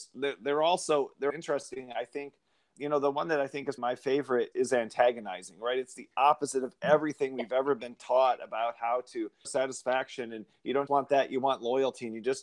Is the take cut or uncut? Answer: cut